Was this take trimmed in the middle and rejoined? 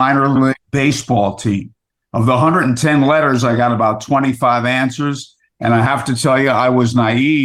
no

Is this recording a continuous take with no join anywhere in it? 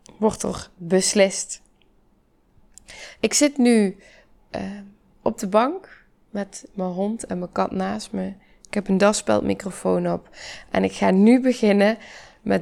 yes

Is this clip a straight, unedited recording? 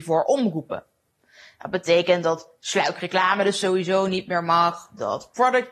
yes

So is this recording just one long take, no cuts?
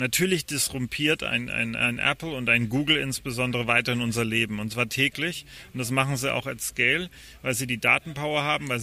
yes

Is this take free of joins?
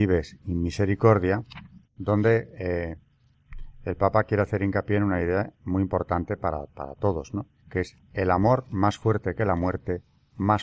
no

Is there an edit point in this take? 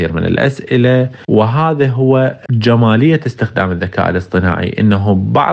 no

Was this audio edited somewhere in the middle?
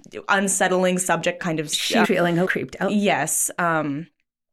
yes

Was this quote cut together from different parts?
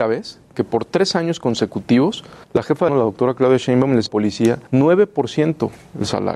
yes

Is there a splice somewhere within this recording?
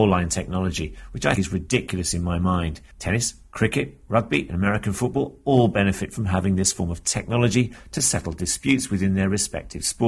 yes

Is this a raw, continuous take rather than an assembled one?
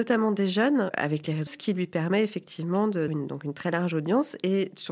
no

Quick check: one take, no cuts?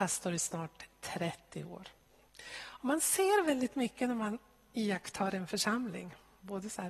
yes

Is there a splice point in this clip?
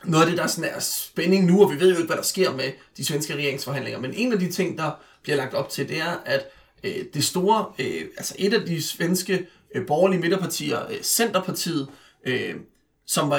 no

